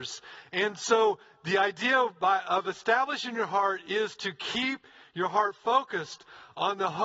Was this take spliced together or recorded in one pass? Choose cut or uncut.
uncut